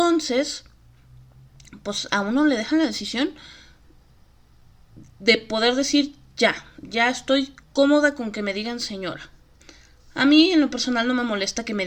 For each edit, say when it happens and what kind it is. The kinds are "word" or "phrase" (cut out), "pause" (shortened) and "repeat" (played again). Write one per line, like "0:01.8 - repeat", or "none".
0:07.6 - pause
0:09.6 - pause